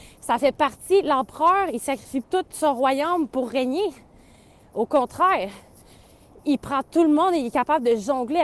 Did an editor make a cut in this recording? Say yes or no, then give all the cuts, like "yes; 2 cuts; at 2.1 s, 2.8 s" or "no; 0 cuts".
yes; 1 cut; at 2.2 s